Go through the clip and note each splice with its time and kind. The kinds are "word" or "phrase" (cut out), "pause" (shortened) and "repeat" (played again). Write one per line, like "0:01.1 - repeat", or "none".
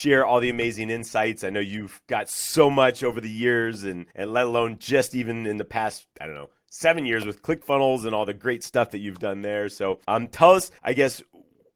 0:04.1 - pause
0:06.1 - pause
0:10.0 - pause
0:10.8 - pause